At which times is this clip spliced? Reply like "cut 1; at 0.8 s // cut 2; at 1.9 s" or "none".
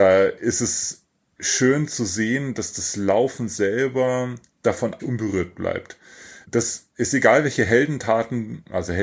cut 1; at 5.0 s // cut 2; at 6.4 s